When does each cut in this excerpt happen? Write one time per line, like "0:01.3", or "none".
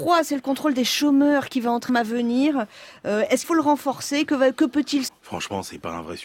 0:01.9
0:03.4
0:05.1